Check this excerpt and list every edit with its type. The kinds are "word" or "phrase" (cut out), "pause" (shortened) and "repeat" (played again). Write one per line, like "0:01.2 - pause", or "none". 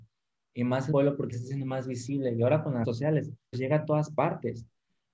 0:00.9 - word
0:01.3 - word
0:02.8 - word
0:03.5 - word

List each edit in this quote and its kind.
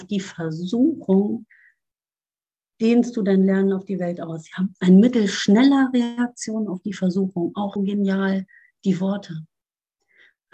0:02.7 - word
0:07.8 - word

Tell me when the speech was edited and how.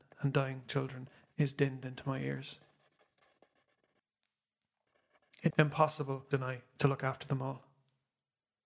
0:05.5 - word
0:06.3 - phrase

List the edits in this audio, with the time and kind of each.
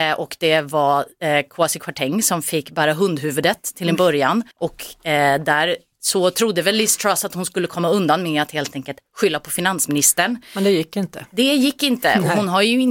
0:04.5 - pause

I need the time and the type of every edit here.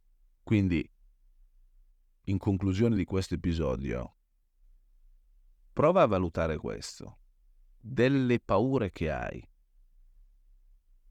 none

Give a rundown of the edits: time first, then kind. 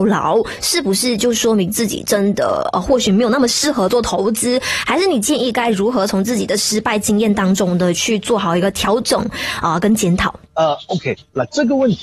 0:10.4 - pause

